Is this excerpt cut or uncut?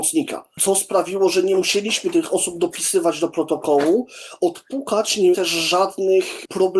cut